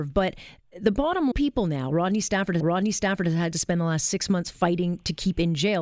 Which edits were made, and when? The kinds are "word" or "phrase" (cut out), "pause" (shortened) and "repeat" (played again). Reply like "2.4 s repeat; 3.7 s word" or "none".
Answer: 1.3 s phrase; 2.6 s repeat

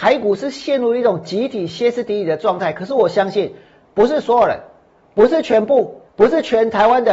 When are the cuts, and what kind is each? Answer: 6.1 s pause

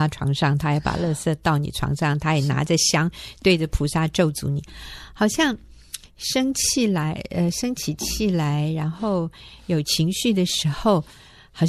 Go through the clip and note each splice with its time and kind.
none

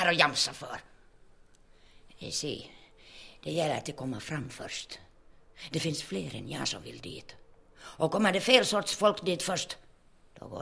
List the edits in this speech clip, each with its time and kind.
none

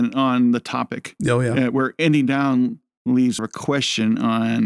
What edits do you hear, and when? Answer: 3.4 s word

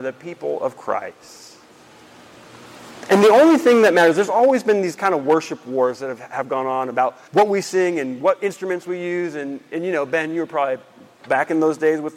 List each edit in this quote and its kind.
7.3 s pause

